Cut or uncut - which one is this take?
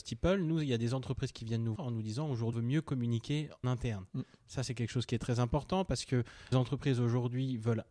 cut